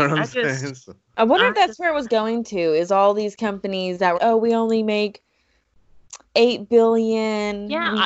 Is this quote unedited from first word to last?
no; 2 cuts; at 4.1 s, 6.2 s

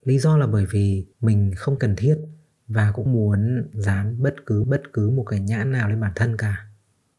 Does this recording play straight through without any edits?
no; 4 cuts; at 1.1 s, 1.8 s, 3.1 s, 4.6 s

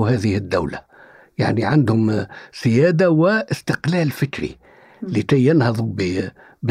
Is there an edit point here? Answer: no; 0 cuts

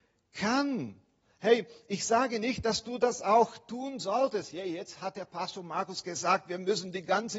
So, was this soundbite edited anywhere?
no; 0 cuts

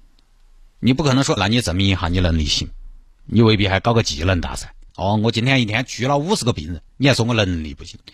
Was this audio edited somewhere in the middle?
yes; 3 cuts; at 1.4 s, 4.9 s, 6.9 s

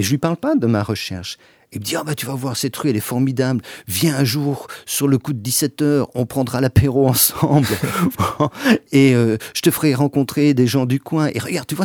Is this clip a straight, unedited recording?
yes; 0 cuts

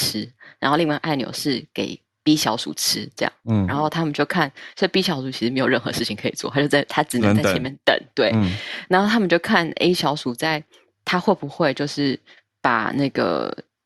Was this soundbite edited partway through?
no; 0 cuts

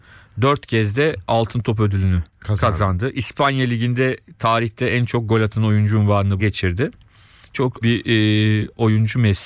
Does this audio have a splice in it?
yes; 3 cuts; at 2.3 s, 6.4 s, 7.8 s

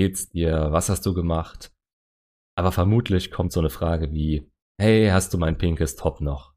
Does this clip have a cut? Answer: no; 0 cuts

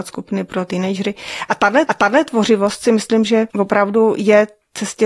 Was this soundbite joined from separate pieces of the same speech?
yes; 2 cuts; at 1.9 s, 3.5 s

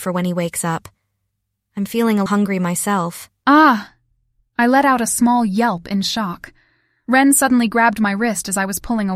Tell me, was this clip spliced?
yes; 1 cut; at 2.3 s

